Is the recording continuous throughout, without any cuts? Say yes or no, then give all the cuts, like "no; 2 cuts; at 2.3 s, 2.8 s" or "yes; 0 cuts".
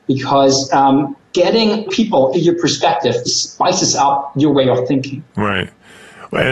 no; 3 cuts; at 1.9 s, 2.3 s, 3.2 s